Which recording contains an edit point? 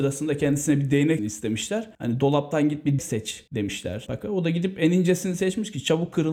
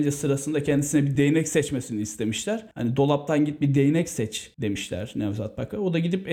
first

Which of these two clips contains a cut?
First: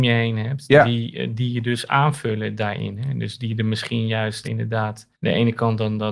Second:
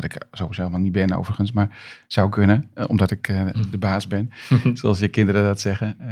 first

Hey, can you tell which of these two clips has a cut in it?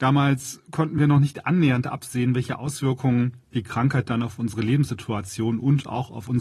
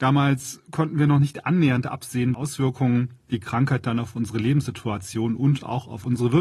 second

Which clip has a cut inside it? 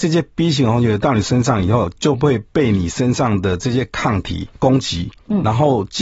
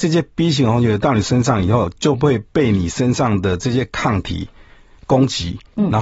first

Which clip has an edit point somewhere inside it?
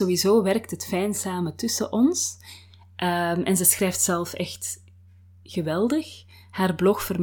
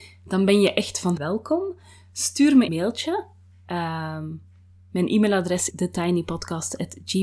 second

